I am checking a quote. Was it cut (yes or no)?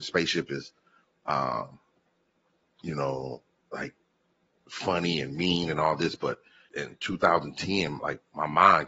yes